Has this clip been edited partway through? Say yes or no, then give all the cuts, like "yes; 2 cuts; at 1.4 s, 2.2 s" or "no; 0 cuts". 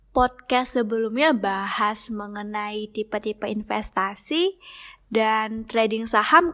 no; 0 cuts